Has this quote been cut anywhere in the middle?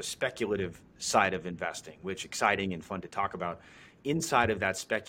yes; 2 cuts; at 1.0 s, 2.2 s

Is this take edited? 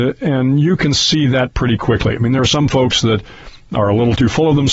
no; 0 cuts

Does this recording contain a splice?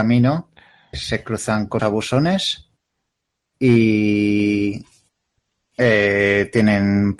yes; 2 cuts; at 0.9 s, 1.8 s

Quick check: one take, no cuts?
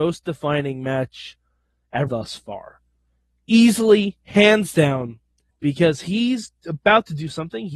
no; 2 cuts; at 2.1 s, 5.5 s

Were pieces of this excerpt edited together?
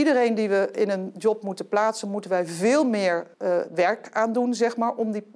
yes; 1 cut; at 3.3 s

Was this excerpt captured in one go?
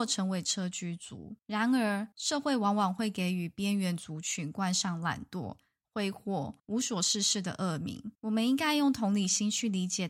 no; 4 cuts; at 1.4 s, 2.1 s, 6.6 s, 8.1 s

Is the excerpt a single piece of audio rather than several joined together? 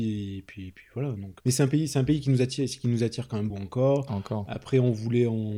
no; 2 cuts; at 1.4 s, 3.5 s

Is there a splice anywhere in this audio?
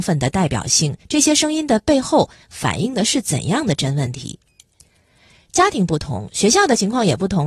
yes; 1 cut; at 1.0 s

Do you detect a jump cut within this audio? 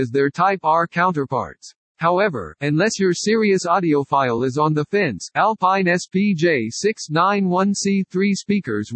no; 0 cuts

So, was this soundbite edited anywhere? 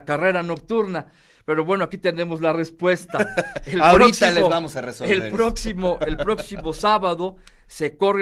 no; 0 cuts

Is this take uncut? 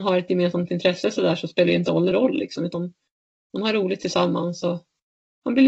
no; 1 cut; at 2.1 s

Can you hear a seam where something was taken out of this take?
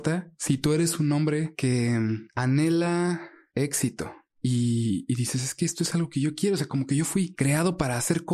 no; 0 cuts

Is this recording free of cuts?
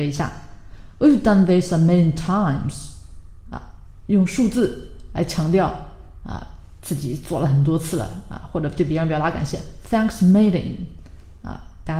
yes; 0 cuts

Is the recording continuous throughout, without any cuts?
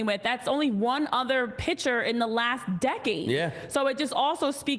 yes; 0 cuts

